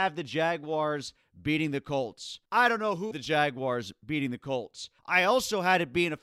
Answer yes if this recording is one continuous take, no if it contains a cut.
no